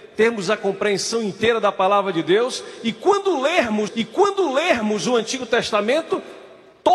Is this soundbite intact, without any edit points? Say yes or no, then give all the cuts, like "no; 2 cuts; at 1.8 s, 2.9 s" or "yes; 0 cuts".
no; 1 cut; at 3.9 s